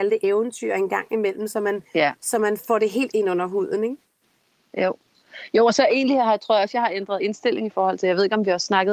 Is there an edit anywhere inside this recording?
no; 0 cuts

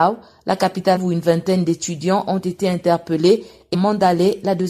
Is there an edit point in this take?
yes; 2 cuts; at 1.0 s, 3.7 s

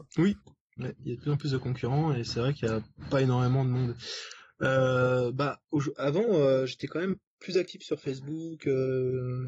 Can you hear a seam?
no; 0 cuts

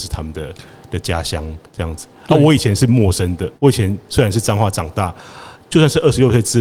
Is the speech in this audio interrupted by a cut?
yes; 2 cuts; at 1.7 s, 3.6 s

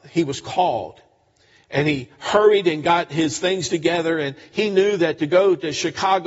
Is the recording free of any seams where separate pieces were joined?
yes; 0 cuts

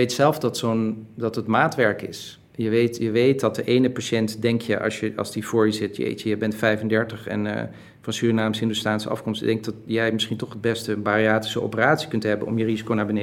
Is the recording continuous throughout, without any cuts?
yes; 0 cuts

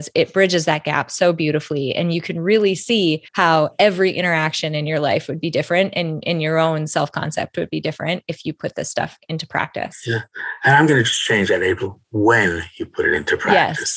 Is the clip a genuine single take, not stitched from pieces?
no; 1 cut; at 3.3 s

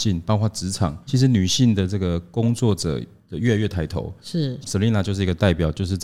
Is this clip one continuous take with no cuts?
no; 2 cuts; at 1.1 s, 4.6 s

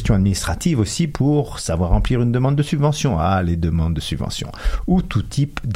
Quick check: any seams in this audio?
no; 0 cuts

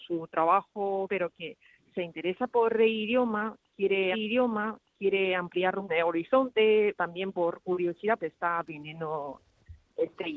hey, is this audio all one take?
no; 5 cuts; at 1.1 s, 4.1 s, 5.9 s, 7.0 s, 8.2 s

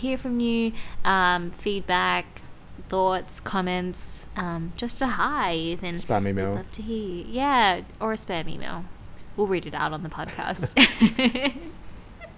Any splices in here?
no; 0 cuts

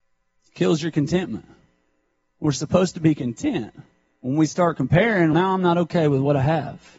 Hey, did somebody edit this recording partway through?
yes; 1 cut; at 5.3 s

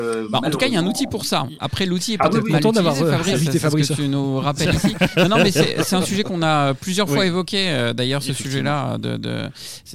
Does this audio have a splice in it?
no; 0 cuts

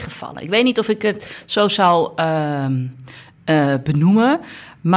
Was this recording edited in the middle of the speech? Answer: no; 0 cuts

